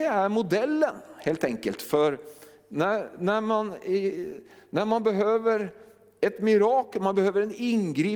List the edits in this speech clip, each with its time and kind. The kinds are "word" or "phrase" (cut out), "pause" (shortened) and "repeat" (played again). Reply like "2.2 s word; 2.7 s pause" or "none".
none